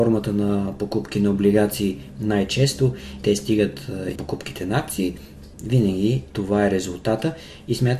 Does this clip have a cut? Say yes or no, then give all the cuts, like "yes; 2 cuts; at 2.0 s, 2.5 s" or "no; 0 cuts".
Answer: yes; 3 cuts; at 3.2 s, 4.2 s, 5.5 s